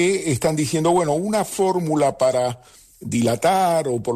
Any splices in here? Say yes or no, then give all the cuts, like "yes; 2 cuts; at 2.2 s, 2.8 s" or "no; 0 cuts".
no; 0 cuts